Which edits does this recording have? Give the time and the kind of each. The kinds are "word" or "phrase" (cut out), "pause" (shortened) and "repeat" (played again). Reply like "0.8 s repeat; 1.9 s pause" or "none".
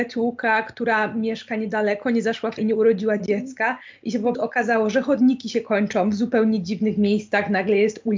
2.6 s word; 4.3 s word